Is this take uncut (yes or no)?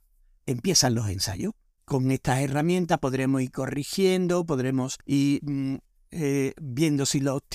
no